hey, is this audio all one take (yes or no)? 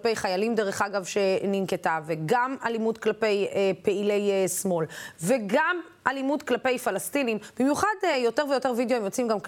yes